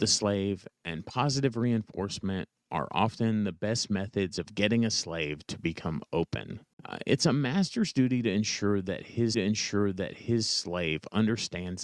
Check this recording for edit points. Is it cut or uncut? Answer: cut